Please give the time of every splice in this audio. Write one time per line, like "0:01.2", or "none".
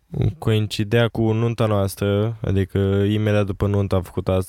0:01.1